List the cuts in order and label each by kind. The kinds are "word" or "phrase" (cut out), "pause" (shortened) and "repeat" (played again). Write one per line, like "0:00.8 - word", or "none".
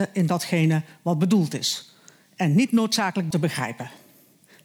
0:03.3 - word